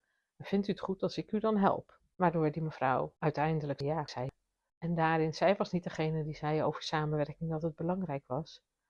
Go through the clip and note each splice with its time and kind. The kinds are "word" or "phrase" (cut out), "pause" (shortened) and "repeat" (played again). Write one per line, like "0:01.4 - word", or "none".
none